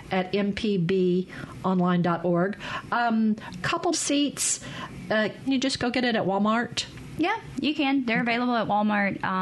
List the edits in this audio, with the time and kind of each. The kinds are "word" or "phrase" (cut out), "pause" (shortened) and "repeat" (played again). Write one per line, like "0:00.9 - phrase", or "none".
0:03.6 - phrase
0:03.9 - phrase
0:05.5 - word